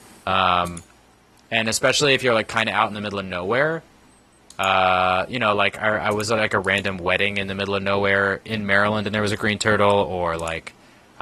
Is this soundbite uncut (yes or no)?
yes